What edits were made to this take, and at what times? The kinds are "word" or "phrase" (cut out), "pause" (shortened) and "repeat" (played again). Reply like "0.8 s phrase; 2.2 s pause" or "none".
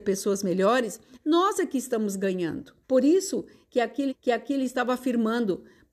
2.8 s pause; 4.1 s repeat